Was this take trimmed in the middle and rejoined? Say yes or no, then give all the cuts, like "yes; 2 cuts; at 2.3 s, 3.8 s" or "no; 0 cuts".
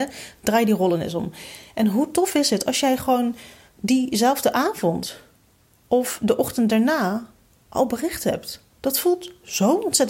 no; 0 cuts